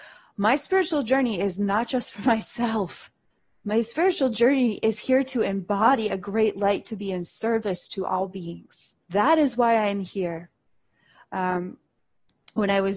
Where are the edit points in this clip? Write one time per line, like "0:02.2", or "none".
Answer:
0:03.3
0:09.0